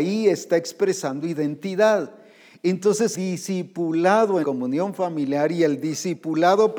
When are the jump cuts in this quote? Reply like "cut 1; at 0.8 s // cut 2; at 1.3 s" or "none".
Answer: cut 1; at 3.1 s // cut 2; at 4.4 s